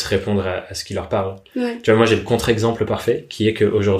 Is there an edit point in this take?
no; 0 cuts

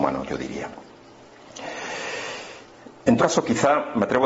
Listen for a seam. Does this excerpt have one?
yes; 1 cut; at 3.2 s

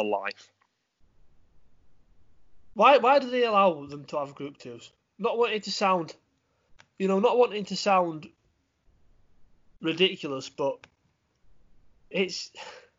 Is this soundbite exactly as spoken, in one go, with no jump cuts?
yes; 0 cuts

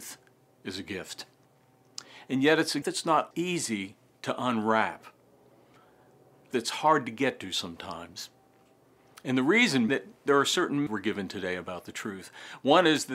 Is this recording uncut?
no; 5 cuts; at 2.8 s, 3.3 s, 6.5 s, 9.9 s, 10.9 s

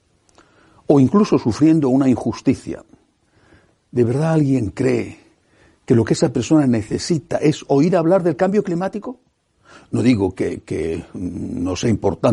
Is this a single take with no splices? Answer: yes; 0 cuts

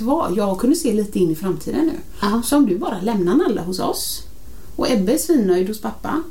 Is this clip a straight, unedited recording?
yes; 0 cuts

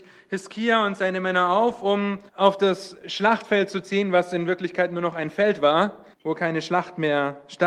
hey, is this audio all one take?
no; 2 cuts; at 2.3 s, 6.1 s

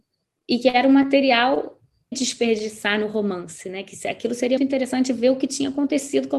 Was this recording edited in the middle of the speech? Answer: yes; 2 cuts; at 2.1 s, 4.6 s

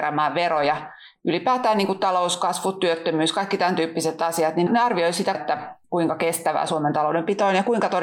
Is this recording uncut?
no; 3 cuts; at 4.7 s, 5.3 s, 5.8 s

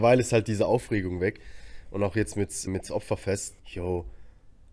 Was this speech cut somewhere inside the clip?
yes; 2 cuts; at 2.7 s, 3.6 s

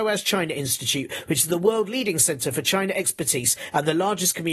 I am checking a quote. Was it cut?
no; 0 cuts

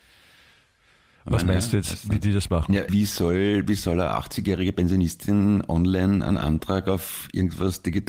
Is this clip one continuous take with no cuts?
no; 1 cut; at 2.9 s

